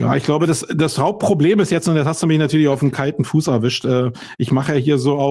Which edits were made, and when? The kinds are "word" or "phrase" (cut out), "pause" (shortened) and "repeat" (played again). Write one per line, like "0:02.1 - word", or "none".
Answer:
none